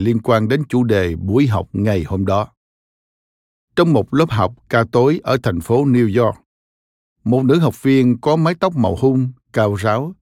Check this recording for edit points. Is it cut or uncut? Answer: uncut